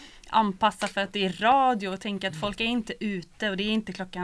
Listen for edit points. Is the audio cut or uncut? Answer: uncut